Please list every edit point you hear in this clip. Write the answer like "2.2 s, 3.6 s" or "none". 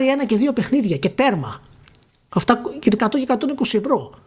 3.0 s